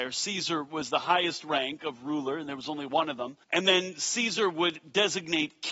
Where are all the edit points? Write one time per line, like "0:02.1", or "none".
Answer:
0:03.4